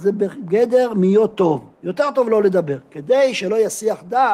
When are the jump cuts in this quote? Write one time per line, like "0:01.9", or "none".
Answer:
0:01.7